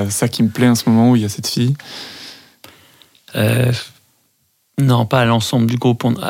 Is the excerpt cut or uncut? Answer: uncut